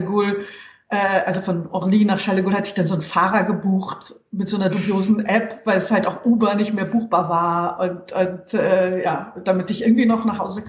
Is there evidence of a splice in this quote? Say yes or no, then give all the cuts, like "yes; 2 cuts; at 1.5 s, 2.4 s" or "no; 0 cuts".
no; 0 cuts